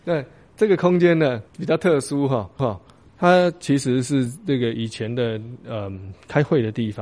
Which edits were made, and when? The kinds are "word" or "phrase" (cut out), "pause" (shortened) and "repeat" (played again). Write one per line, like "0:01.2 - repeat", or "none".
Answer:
0:01.5 - pause
0:02.6 - repeat